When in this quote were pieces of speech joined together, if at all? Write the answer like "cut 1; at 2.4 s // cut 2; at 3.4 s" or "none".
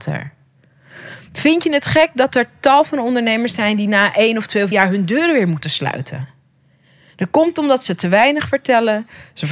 cut 1; at 4.7 s